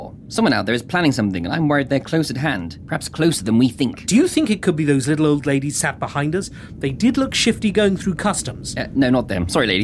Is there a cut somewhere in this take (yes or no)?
no